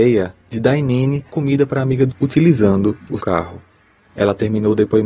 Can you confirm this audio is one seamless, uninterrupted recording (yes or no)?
no